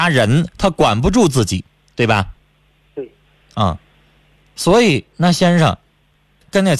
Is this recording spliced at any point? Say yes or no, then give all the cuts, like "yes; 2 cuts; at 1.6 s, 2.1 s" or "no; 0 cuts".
no; 0 cuts